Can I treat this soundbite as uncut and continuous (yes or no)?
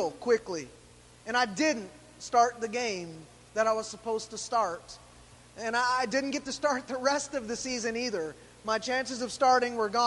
yes